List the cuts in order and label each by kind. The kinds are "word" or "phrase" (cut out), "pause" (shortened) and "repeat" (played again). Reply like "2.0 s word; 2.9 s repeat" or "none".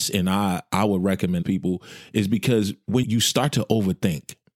1.4 s word; 3.0 s word